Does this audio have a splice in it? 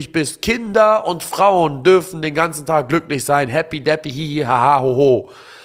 no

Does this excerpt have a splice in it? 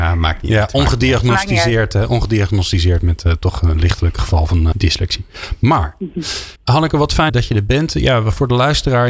yes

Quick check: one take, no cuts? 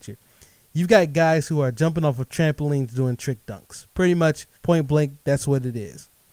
no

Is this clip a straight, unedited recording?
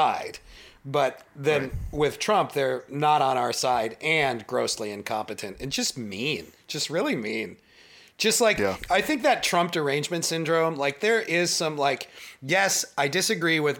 yes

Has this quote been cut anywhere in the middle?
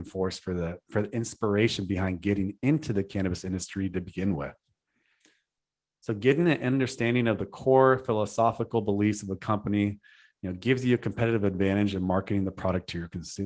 no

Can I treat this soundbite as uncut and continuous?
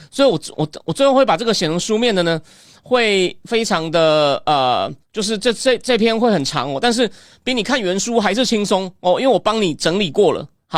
no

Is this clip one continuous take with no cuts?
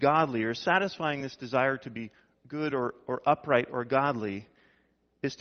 yes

